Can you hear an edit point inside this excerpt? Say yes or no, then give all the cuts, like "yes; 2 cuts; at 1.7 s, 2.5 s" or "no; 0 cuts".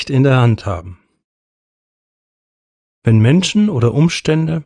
no; 0 cuts